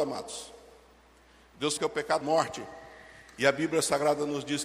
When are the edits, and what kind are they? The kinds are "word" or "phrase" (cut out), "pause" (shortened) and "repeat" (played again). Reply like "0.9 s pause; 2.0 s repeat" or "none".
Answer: 1.8 s phrase; 2.2 s word